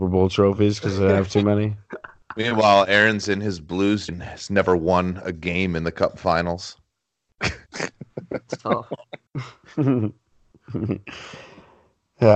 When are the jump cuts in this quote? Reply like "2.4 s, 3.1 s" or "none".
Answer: 4.1 s, 7.7 s, 9.3 s